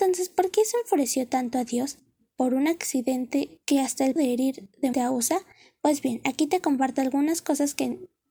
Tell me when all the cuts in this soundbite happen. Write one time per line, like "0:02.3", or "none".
0:03.6
0:04.2
0:04.9